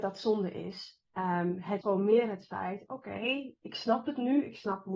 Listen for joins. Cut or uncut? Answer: cut